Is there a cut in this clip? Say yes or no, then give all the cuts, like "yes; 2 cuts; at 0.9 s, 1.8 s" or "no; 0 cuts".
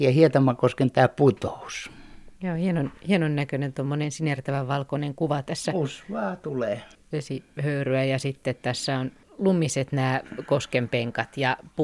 no; 0 cuts